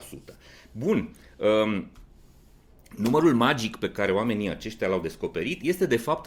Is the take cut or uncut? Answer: uncut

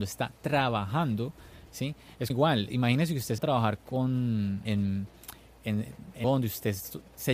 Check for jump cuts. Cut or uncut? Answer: cut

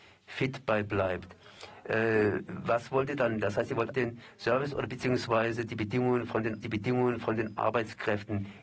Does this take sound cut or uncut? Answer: cut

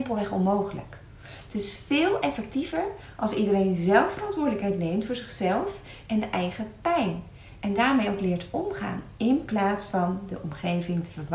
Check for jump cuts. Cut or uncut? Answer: uncut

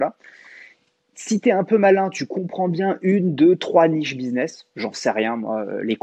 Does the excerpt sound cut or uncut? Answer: uncut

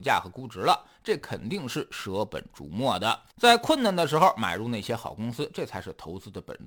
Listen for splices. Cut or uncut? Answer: cut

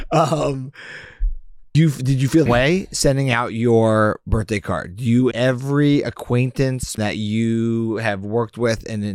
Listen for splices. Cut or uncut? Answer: cut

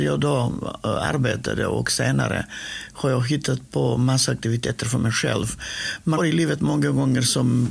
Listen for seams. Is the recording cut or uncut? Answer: cut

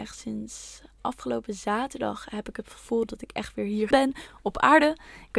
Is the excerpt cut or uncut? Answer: cut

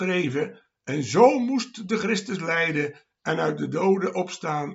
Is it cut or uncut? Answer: uncut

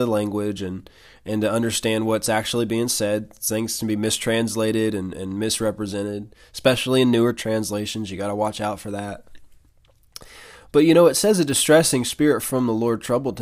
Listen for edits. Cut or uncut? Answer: uncut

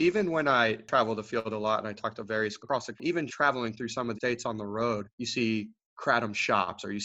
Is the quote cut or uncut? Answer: cut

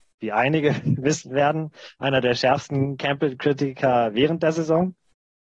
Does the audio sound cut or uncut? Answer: uncut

